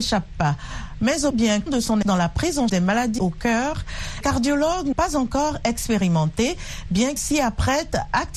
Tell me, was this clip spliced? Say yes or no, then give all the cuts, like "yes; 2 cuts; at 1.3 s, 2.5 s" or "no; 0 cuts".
yes; 8 cuts; at 1.3 s, 1.7 s, 2.0 s, 2.7 s, 3.2 s, 4.2 s, 4.9 s, 7.2 s